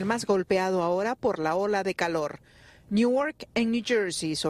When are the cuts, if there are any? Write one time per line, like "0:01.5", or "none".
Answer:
none